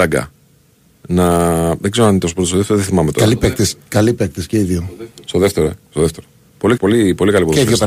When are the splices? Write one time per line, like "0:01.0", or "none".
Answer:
0:06.8